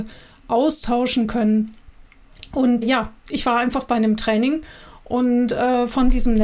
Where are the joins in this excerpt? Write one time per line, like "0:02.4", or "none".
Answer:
0:02.8

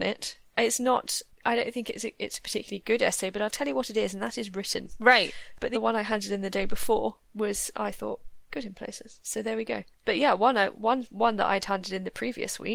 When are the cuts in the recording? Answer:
0:05.7
0:08.5

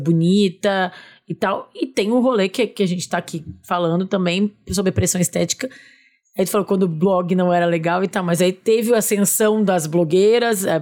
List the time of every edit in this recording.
none

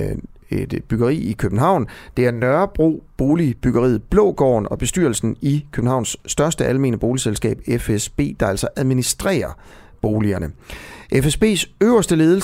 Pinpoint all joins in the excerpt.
none

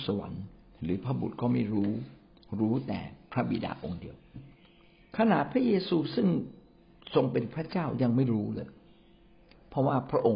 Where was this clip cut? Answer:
none

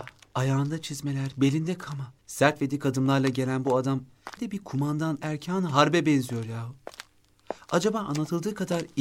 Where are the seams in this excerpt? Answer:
0:02.2
0:04.4
0:05.2

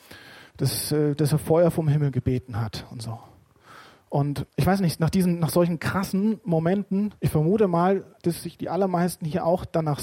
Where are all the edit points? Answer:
0:04.5
0:07.2

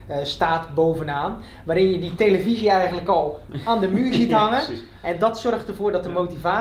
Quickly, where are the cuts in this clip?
none

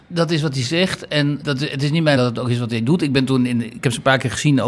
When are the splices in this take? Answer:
0:01.4
0:02.2

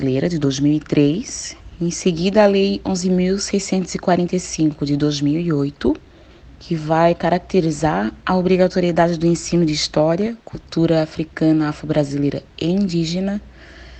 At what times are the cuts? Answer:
0:10.4

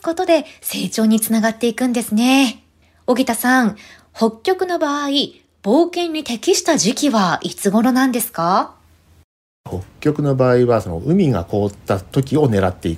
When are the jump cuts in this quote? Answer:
0:02.8

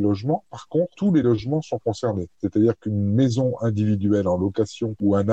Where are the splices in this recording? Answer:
none

